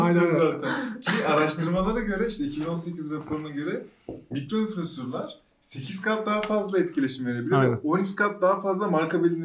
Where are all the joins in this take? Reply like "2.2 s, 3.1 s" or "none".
none